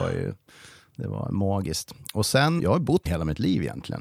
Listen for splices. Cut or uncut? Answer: cut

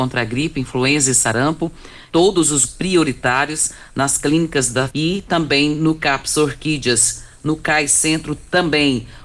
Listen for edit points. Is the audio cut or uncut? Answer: cut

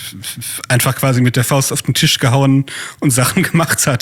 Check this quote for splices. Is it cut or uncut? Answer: uncut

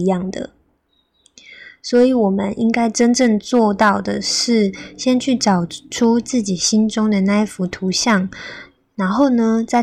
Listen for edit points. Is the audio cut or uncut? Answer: uncut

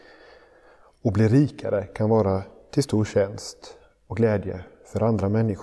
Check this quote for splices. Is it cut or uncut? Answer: uncut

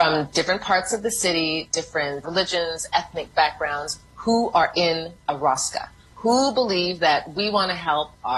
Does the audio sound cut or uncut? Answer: cut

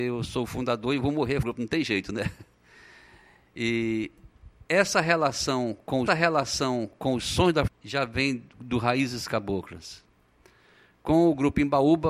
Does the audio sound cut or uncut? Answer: cut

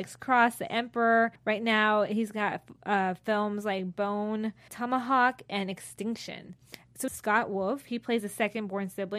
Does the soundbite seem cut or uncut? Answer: cut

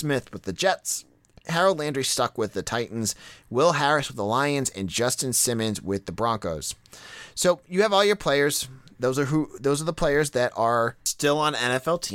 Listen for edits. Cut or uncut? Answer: uncut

